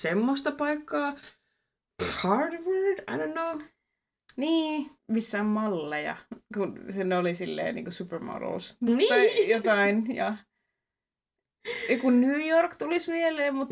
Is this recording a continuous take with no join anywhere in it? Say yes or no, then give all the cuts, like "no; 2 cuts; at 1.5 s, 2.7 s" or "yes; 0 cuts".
no; 2 cuts; at 5.0 s, 6.5 s